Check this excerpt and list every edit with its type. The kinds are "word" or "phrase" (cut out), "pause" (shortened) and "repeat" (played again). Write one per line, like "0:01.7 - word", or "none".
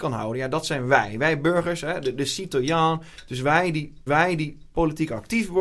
0:04.1 - repeat